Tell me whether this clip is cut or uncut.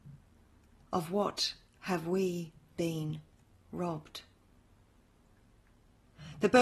uncut